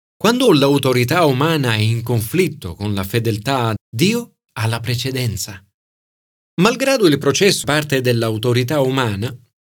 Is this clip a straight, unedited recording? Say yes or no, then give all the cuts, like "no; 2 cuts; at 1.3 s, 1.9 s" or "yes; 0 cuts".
no; 2 cuts; at 3.8 s, 7.6 s